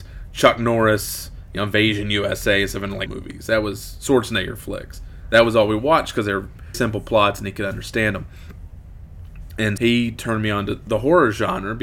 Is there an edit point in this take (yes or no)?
yes